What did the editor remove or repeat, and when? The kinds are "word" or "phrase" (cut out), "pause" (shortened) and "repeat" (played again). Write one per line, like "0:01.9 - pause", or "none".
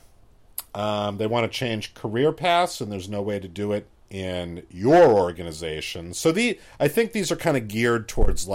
0:03.9 - pause